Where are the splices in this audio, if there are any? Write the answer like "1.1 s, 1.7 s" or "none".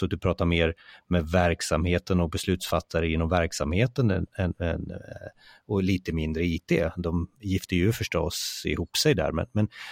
none

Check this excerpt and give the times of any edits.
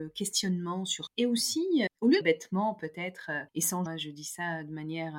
1.1 s, 1.9 s, 2.2 s, 3.5 s, 3.9 s

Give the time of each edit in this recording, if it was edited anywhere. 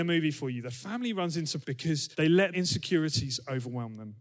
1.6 s, 2.1 s, 2.5 s

